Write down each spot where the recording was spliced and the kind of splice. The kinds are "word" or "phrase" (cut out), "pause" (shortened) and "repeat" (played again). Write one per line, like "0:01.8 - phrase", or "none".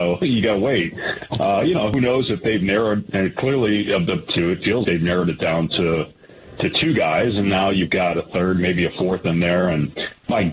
0:04.3 - phrase
0:04.8 - word